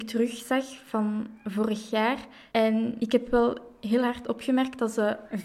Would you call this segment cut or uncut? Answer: uncut